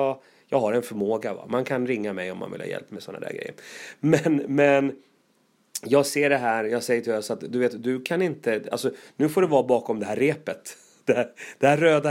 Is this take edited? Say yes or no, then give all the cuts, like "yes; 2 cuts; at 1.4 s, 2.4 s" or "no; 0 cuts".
no; 0 cuts